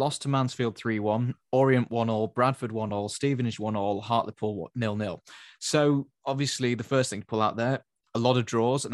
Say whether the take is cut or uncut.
uncut